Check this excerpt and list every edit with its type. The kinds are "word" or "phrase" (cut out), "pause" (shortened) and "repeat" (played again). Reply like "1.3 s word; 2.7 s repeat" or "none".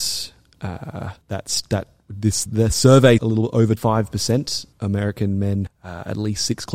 1.2 s pause; 2.5 s word; 3.2 s phrase; 3.8 s word; 4.7 s word; 5.7 s word